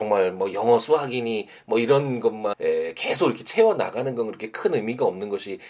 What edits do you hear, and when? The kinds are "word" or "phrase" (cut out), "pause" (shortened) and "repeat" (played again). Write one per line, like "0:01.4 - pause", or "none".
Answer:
0:02.5 - word